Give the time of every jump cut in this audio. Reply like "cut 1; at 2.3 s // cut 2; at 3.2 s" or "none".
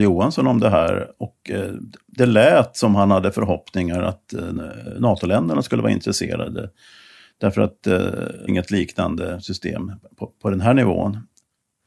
cut 1; at 8.5 s